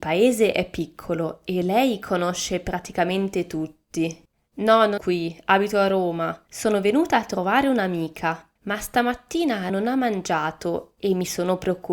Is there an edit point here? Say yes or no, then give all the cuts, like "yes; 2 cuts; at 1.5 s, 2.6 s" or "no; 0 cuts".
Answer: yes; 5 cuts; at 4.3 s, 5.0 s, 6.5 s, 8.6 s, 9.7 s